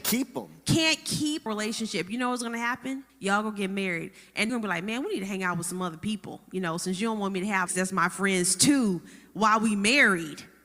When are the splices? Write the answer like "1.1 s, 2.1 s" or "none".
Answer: 1.5 s, 3.1 s, 4.5 s, 7.7 s